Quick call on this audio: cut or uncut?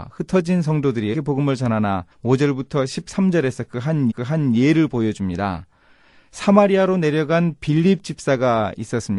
cut